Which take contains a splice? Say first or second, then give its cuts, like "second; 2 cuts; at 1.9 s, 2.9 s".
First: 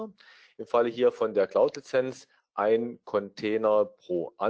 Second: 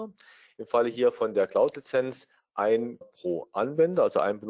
second; 1 cut; at 3.0 s